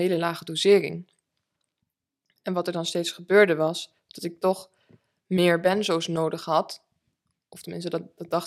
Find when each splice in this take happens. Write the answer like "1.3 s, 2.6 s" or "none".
none